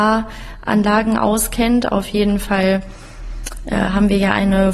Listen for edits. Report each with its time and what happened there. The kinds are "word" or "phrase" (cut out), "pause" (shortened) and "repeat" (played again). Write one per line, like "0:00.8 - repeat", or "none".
none